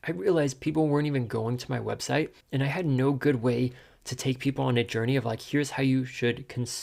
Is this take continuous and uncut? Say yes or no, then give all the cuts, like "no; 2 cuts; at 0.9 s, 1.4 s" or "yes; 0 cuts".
no; 1 cut; at 2.4 s